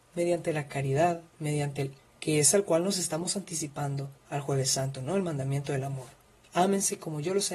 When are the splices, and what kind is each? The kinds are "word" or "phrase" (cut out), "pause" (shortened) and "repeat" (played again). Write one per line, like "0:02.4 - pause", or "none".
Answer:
0:01.3 - pause
0:02.0 - word